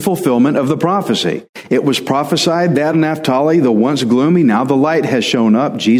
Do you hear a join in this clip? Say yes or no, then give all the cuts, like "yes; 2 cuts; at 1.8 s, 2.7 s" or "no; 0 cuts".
yes; 1 cut; at 2.9 s